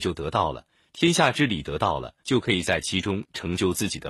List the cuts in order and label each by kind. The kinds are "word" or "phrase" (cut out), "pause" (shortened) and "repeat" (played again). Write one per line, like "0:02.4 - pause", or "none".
0:02.2 - pause